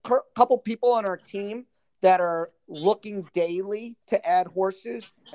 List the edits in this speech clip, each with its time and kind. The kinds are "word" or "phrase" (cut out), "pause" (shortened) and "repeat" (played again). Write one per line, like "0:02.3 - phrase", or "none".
0:04.0 - pause